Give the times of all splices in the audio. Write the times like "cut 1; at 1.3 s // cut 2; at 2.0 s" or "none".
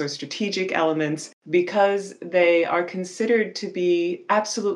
none